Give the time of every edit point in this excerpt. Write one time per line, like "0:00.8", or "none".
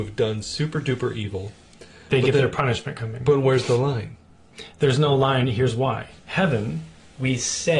0:06.2

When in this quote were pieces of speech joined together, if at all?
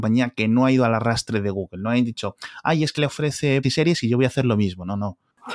0:03.0
0:03.6

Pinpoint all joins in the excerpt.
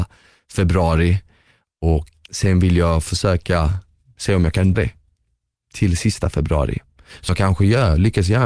0:02.3
0:04.7
0:07.3

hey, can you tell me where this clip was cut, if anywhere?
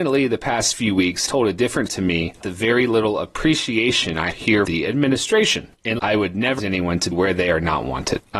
0:01.3
0:01.9
0:02.4
0:04.3
0:04.7
0:06.0
0:06.6
0:07.1

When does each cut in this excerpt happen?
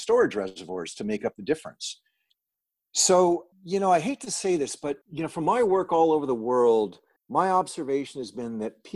0:03.5
0:05.0
0:07.2

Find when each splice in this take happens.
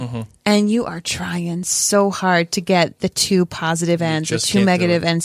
none

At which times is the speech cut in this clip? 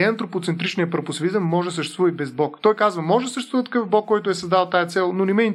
none

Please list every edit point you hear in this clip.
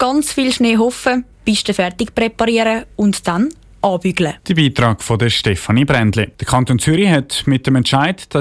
0:01.3
0:04.4
0:06.3

